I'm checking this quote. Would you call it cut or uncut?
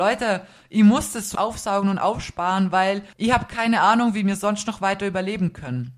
cut